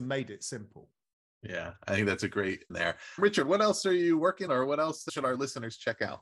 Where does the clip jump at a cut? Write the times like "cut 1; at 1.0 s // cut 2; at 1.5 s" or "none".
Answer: cut 1; at 2.7 s // cut 2; at 4.5 s